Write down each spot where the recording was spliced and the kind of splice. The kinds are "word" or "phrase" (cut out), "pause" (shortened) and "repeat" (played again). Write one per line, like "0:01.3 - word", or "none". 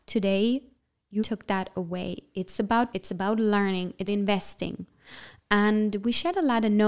0:01.2 - word
0:02.9 - word
0:04.1 - word